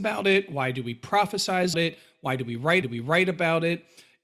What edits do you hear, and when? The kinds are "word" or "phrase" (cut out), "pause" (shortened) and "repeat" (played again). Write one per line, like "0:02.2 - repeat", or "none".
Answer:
0:01.7 - word
0:02.8 - repeat